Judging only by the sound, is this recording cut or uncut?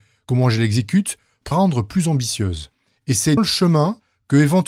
cut